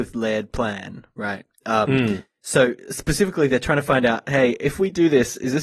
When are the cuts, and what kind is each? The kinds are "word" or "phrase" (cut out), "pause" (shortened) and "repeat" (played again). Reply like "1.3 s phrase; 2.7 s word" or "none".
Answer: none